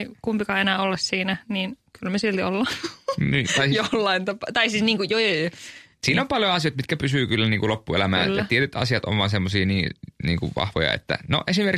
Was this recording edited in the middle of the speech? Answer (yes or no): no